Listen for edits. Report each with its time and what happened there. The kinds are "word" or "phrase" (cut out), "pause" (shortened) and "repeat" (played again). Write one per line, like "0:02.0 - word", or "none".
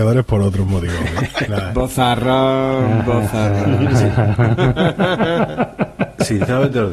0:01.5 - phrase